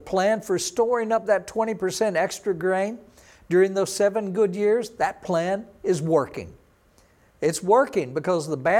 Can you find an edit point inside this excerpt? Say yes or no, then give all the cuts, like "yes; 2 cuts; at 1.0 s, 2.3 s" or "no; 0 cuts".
no; 0 cuts